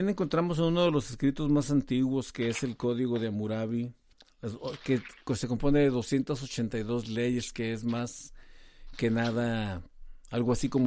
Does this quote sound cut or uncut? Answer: uncut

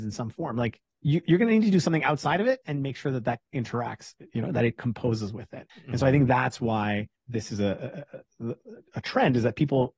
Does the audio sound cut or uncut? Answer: cut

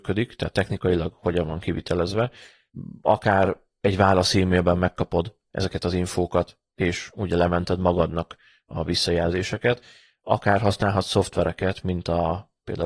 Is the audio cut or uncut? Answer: uncut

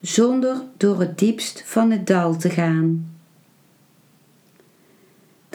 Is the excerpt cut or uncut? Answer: uncut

